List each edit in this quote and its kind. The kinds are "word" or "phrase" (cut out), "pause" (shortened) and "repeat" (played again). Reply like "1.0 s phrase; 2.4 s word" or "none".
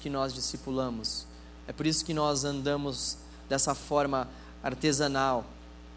none